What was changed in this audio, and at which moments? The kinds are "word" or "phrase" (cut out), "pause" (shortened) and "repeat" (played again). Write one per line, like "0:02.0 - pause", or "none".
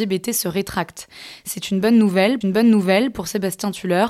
0:02.4 - repeat